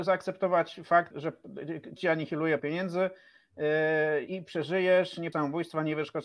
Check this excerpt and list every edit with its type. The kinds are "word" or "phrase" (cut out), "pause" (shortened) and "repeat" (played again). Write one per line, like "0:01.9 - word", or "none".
0:01.1 - word
0:02.0 - word
0:02.6 - word
0:04.3 - word
0:05.3 - word